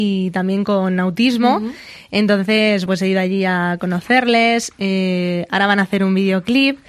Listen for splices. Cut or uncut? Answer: cut